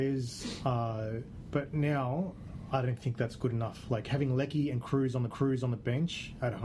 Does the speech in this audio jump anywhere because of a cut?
yes; 1 cut; at 5.3 s

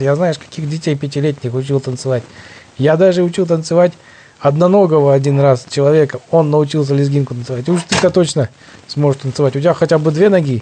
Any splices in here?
no; 0 cuts

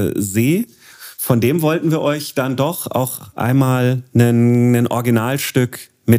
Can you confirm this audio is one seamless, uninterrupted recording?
yes; 0 cuts

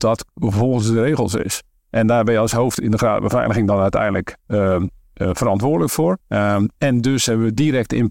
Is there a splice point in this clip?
yes; 1 cut; at 6.2 s

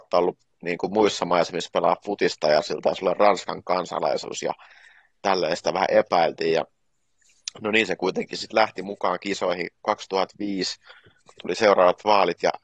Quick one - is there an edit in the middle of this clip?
no; 0 cuts

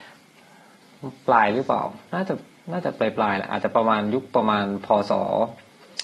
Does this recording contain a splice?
yes; 1 cut; at 2.5 s

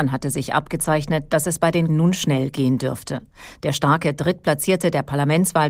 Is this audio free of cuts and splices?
no; 1 cut; at 1.9 s

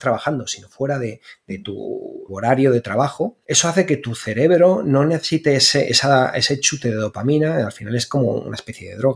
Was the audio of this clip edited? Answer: yes; 2 cuts; at 2.3 s, 3.4 s

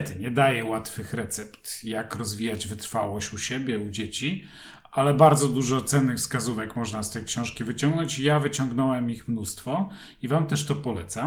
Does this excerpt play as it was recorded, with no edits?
yes; 0 cuts

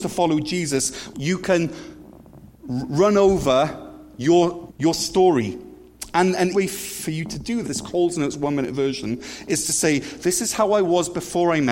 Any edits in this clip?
yes; 5 cuts; at 1.1 s, 2.5 s, 4.7 s, 6.5 s, 7.6 s

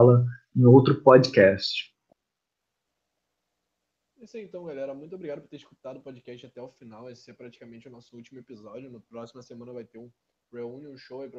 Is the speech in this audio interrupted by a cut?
no; 0 cuts

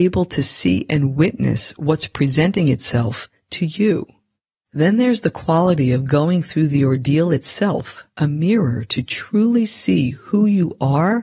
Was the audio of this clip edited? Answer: yes; 2 cuts; at 4.4 s, 8.1 s

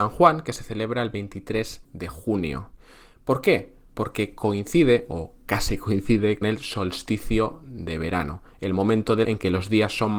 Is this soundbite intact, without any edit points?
no; 3 cuts; at 1.8 s, 6.4 s, 9.2 s

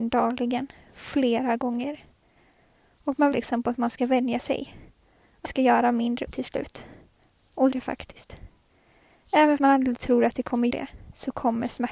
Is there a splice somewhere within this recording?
yes; 6 cuts; at 3.3 s, 5.4 s, 6.3 s, 7.7 s, 9.6 s, 10.7 s

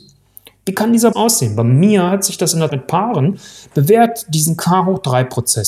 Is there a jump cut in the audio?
yes; 2 cuts; at 1.1 s, 2.7 s

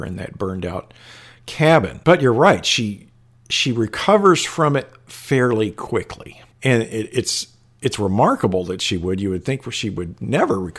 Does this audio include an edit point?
no; 0 cuts

